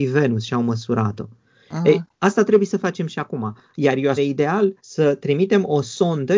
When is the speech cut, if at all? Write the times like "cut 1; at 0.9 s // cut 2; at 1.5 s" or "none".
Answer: cut 1; at 2.1 s // cut 2; at 4.2 s // cut 3; at 4.8 s